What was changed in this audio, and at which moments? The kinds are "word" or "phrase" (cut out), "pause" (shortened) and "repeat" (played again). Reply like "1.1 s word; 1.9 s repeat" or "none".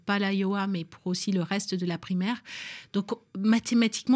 none